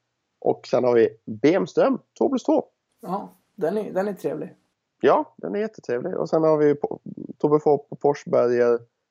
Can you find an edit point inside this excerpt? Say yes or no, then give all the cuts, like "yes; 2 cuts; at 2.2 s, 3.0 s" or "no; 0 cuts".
no; 0 cuts